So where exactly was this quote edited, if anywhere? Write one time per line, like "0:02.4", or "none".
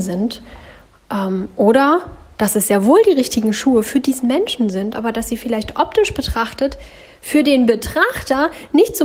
none